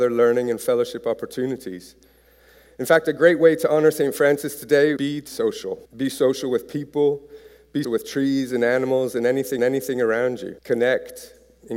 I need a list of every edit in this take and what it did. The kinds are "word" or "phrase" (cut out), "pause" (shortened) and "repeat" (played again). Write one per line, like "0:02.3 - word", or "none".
0:05.0 - word
0:05.3 - word
0:05.9 - pause
0:07.8 - word
0:09.6 - repeat
0:10.6 - pause